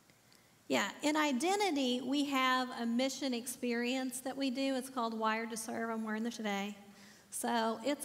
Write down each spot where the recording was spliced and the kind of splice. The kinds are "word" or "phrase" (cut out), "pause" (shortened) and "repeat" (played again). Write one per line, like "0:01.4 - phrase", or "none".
0:06.3 - word